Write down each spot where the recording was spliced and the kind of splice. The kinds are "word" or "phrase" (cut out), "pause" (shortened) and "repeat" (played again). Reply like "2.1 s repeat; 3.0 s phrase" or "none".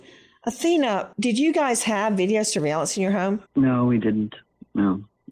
1.1 s pause; 3.5 s pause